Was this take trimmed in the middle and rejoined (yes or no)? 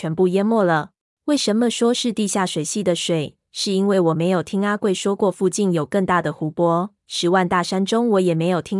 yes